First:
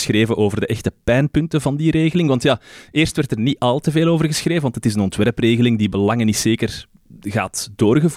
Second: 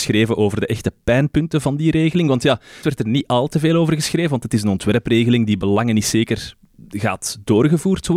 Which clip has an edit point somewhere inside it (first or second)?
second